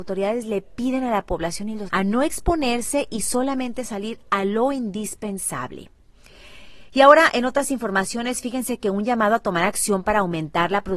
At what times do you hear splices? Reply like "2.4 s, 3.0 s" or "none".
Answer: 1.9 s